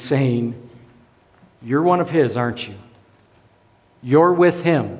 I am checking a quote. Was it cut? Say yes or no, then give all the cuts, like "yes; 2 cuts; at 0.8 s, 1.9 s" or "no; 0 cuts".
no; 0 cuts